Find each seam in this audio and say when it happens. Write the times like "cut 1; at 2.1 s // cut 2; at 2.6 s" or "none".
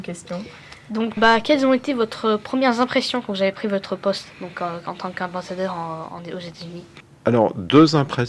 cut 1; at 1.2 s